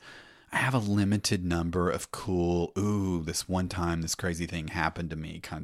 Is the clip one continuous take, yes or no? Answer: yes